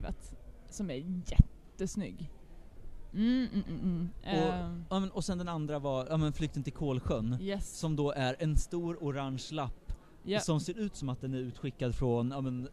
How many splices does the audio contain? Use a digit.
1